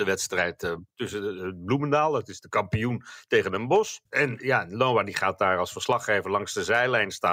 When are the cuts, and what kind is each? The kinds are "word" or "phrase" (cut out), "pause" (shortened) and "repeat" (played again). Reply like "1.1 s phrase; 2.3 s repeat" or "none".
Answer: 4.1 s pause

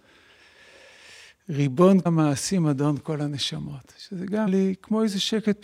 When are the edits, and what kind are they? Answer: 2.1 s word; 4.5 s word

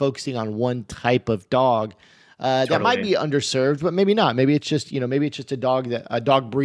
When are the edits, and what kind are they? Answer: none

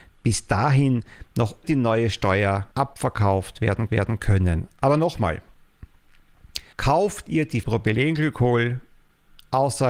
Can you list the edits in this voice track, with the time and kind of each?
1.6 s word; 2.7 s pause; 3.9 s repeat; 6.7 s pause; 7.6 s word

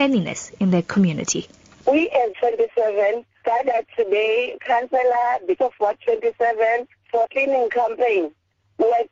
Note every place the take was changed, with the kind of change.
2.3 s word; 3.4 s word; 4.6 s word; 5.6 s word; 7.2 s word

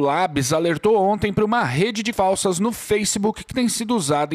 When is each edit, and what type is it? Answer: 2.1 s word

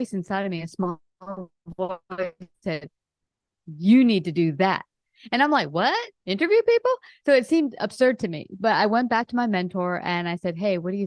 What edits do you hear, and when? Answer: 2.5 s pause; 6.2 s pause

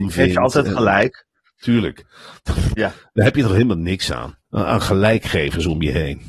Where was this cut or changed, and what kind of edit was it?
4.5 s pause

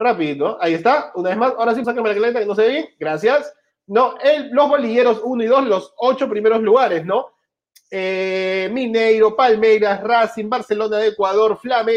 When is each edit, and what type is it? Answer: 1.8 s phrase

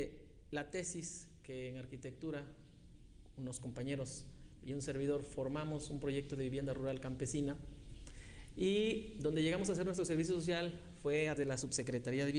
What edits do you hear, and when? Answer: 11.4 s word

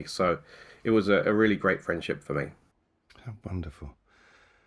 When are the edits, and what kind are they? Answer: none

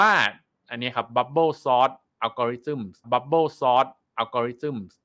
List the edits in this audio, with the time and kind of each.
3.0 s repeat

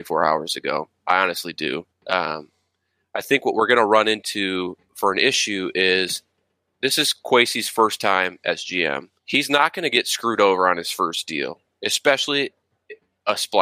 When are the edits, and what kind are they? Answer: 1.9 s pause; 9.2 s pause

